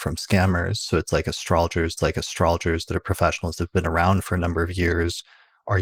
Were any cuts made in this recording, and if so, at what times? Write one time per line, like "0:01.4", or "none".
0:02.0